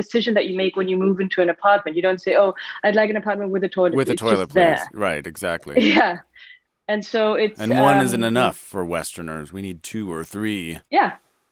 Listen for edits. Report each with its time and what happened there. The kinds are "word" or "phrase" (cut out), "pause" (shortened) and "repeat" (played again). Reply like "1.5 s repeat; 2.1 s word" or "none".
none